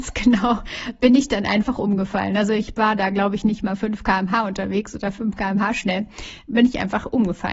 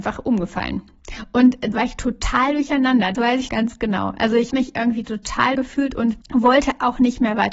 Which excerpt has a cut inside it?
second; 6 cuts; at 1.7 s, 3.1 s, 3.5 s, 4.5 s, 5.5 s, 6.2 s

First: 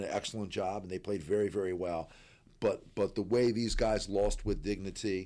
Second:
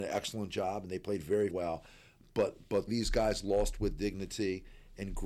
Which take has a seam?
second; 2 cuts; at 1.5 s, 2.9 s

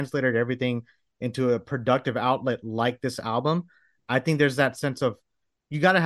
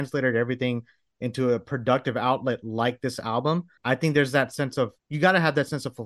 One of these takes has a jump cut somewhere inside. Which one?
second; 2 cuts; at 3.8 s, 5.0 s

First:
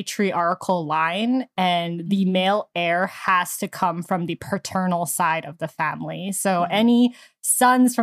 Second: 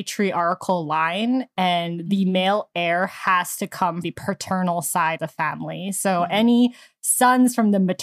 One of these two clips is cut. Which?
second; 2 cuts; at 4.0 s, 5.2 s

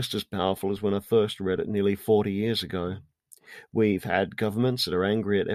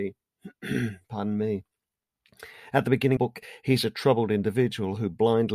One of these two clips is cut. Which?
second; 1 cut; at 3.2 s

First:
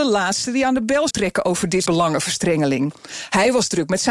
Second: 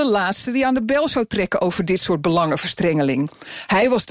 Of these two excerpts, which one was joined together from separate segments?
first; 2 cuts; at 1.1 s, 1.9 s

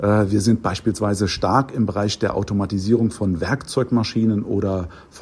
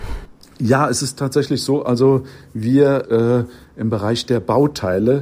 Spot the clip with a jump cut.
second; 1 cut; at 3.0 s

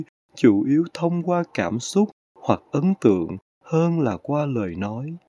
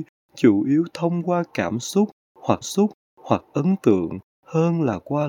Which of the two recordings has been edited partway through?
second; 1 cut; at 2.6 s

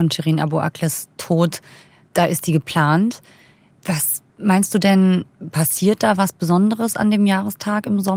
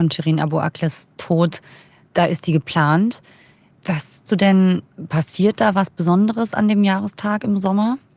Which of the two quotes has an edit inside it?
second; 1 cut; at 4.3 s

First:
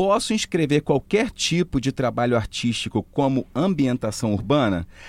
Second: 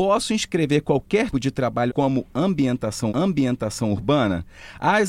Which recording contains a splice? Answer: second; 3 cuts; at 1.3 s, 1.9 s, 3.1 s

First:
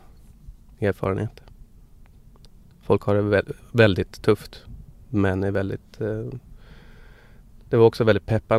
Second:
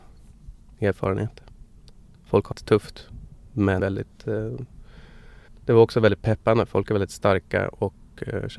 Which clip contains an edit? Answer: second; 4 cuts; at 1.8 s, 2.5 s, 3.8 s, 5.5 s

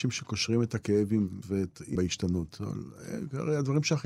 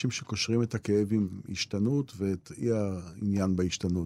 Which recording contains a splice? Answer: first; 2 cuts; at 1.4 s, 2.0 s

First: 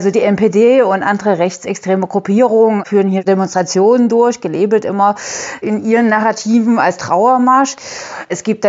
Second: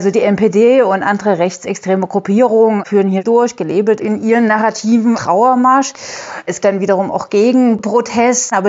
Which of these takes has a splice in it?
second; 4 cuts; at 3.2 s, 4.0 s, 5.1 s, 6.6 s

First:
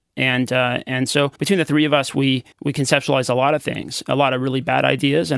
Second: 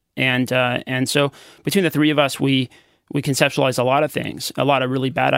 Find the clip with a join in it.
first; 2 cuts; at 1.4 s, 2.5 s

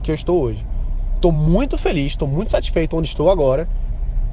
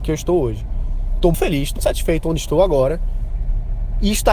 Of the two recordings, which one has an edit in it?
second; 2 cuts; at 1.3 s, 1.8 s

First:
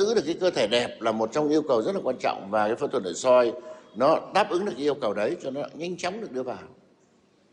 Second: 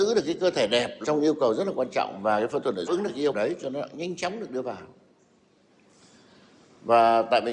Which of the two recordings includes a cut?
second; 3 cuts; at 1.0 s, 2.9 s, 3.3 s

